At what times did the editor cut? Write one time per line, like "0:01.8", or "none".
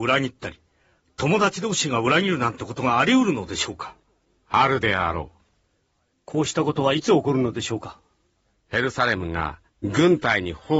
0:09.7

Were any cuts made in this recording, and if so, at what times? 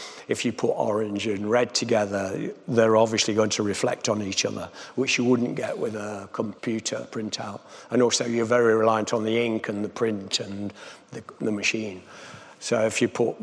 0:06.6

